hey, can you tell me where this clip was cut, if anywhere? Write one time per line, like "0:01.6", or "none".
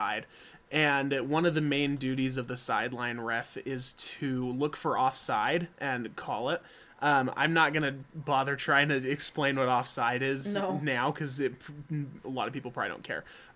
none